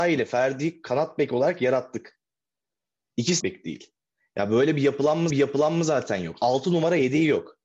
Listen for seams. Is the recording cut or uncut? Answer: cut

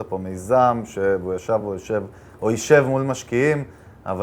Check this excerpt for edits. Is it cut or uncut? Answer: uncut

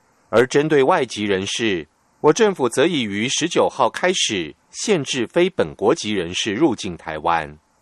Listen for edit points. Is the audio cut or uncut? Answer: uncut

